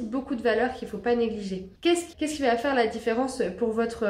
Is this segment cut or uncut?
cut